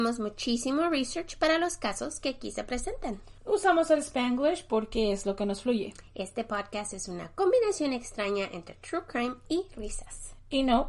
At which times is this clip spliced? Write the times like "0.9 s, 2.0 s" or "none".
3.4 s